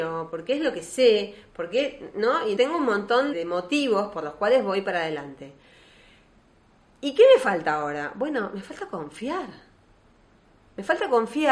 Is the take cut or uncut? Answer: cut